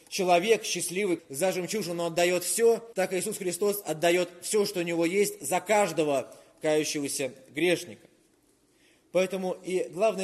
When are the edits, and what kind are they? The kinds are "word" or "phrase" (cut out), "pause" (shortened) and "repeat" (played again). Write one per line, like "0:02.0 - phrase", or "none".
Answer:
0:01.2 - word
0:02.9 - word

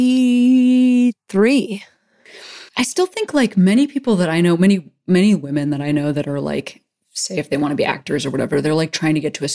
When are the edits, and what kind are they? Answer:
0:02.7 - pause

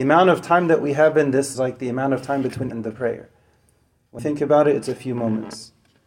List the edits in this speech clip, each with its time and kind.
0:01.5 - phrase
0:02.7 - word
0:04.2 - word

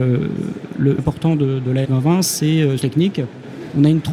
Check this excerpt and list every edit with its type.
0:01.0 - phrase
0:01.8 - word
0:02.8 - phrase

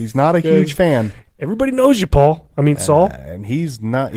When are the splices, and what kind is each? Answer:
none

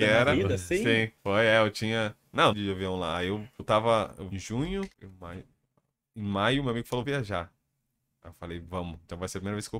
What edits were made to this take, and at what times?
0:01.2 - pause
0:02.5 - phrase
0:03.6 - word
0:04.3 - word
0:04.9 - pause
0:07.0 - word

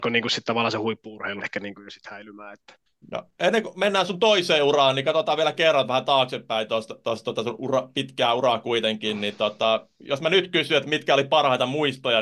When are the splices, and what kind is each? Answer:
0:01.4 - word
0:02.9 - pause

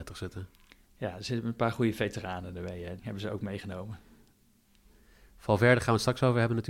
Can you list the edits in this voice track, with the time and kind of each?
0:03.0 - word

